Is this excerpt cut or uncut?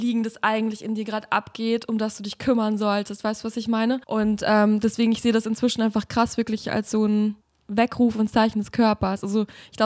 cut